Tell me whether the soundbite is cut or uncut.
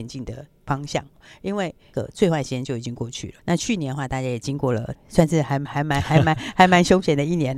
cut